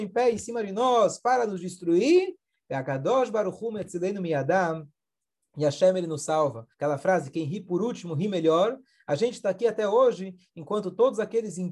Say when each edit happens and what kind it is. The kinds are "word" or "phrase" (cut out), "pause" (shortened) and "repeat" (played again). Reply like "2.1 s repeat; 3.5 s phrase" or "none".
6.7 s pause